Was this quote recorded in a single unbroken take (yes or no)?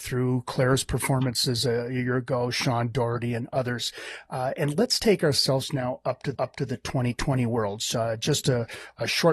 no